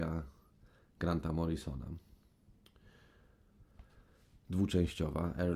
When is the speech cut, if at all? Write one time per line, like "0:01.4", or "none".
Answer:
none